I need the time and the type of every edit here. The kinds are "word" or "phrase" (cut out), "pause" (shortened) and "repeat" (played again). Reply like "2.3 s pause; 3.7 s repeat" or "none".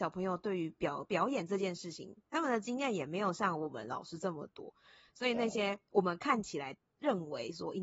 none

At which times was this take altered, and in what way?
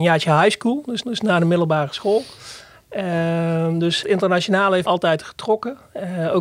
1.0 s repeat; 4.0 s word; 4.9 s word

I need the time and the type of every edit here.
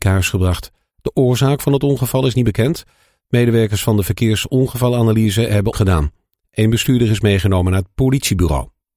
5.7 s word

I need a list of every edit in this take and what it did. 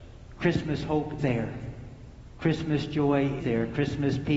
1.2 s word; 3.4 s word

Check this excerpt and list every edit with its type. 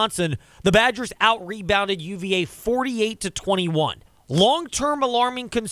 4.1 s pause

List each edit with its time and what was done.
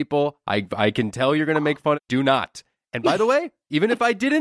none

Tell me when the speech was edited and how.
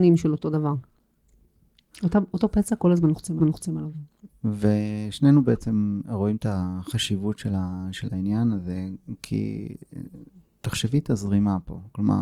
3.4 s repeat

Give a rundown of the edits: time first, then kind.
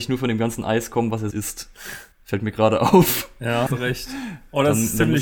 1.3 s word; 2.1 s pause; 3.7 s word

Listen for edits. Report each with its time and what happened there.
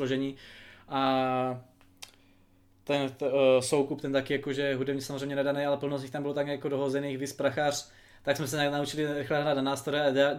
none

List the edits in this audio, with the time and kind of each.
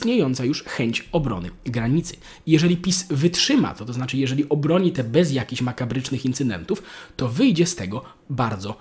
5.0 s word

